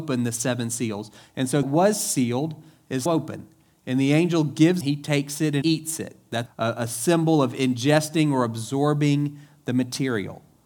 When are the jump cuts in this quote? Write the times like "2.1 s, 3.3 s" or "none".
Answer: 1.6 s, 3.1 s, 4.8 s, 5.6 s, 6.5 s